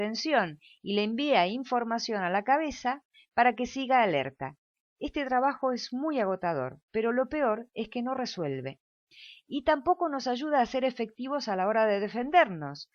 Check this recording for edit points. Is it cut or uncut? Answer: uncut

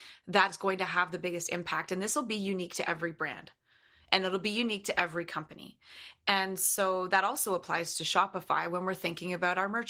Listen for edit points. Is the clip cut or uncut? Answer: uncut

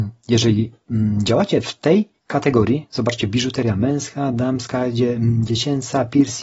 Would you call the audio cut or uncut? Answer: cut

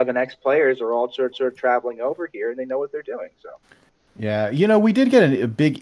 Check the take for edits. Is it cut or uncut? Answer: cut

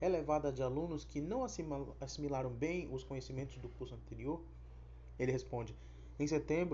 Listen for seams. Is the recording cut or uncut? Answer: uncut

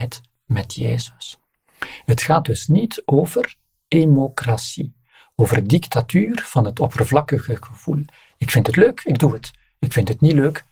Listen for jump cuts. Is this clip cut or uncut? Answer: uncut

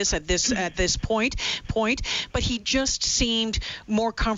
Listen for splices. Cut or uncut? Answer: cut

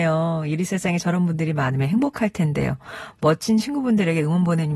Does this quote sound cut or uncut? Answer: uncut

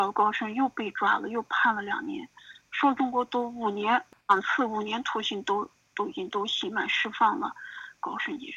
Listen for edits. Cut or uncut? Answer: uncut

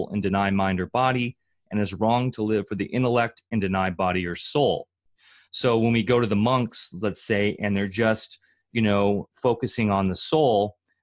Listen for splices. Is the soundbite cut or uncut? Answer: uncut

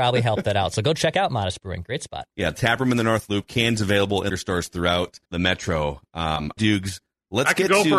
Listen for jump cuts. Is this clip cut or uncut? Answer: cut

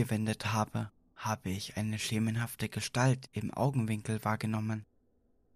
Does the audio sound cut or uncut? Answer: uncut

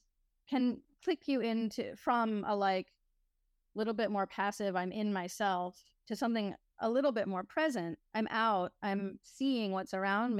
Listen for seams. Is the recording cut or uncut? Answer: cut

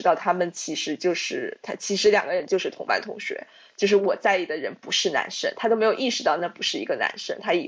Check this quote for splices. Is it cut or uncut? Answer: uncut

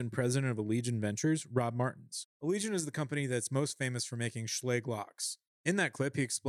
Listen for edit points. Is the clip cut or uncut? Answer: uncut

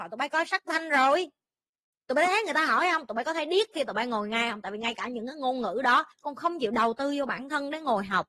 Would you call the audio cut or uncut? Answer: cut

